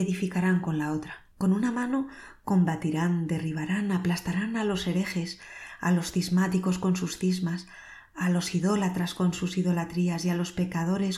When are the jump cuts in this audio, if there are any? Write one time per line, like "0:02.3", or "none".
0:01.3

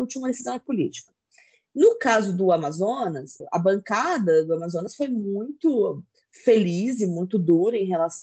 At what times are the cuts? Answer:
0:03.4

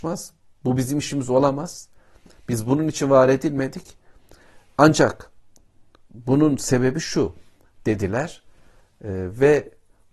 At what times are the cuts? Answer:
none

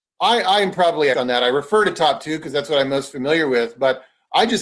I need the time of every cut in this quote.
0:01.1

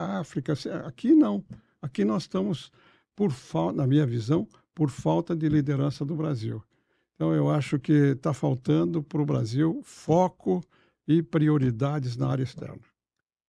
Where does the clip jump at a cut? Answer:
none

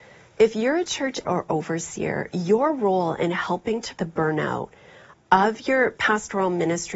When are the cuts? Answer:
0:01.2
0:04.0
0:05.1

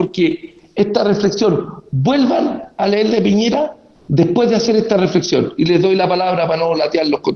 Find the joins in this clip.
0:03.1

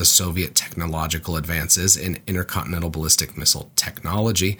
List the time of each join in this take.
none

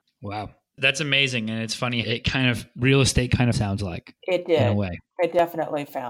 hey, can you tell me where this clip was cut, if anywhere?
0:02.0
0:03.5

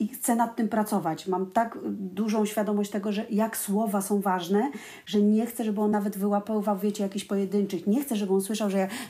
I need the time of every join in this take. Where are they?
none

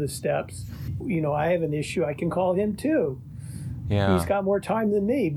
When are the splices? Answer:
0:01.0

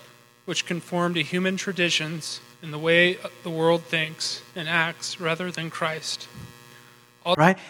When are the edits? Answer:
0:02.5
0:04.5

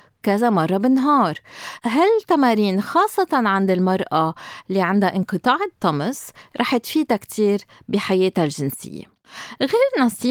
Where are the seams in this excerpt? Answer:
none

